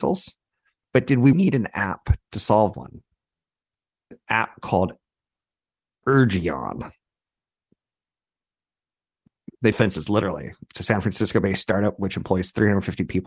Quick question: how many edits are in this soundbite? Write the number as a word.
four